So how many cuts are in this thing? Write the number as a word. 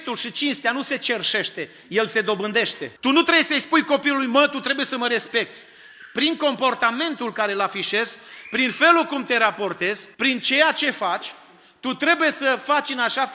two